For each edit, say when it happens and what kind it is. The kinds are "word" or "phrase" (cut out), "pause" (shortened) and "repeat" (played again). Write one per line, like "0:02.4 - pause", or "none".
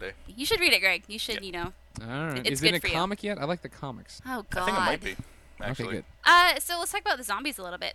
0:02.4 - word
0:06.1 - pause